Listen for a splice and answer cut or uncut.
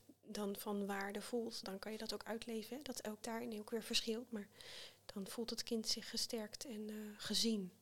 cut